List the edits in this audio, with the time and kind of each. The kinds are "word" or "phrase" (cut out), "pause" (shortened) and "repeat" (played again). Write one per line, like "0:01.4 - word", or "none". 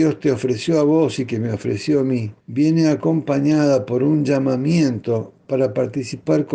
0:02.4 - pause